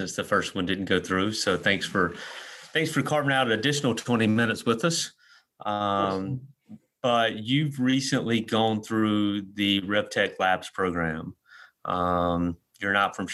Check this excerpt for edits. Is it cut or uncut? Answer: uncut